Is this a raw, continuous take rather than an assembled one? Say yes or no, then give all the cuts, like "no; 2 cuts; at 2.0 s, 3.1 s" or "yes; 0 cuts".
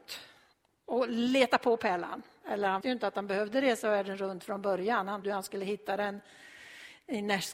no; 2 cuts; at 2.8 s, 5.2 s